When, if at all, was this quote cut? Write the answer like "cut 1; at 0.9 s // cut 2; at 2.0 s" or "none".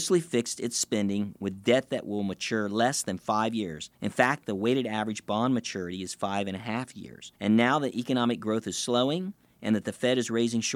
cut 1; at 3.9 s // cut 2; at 7.3 s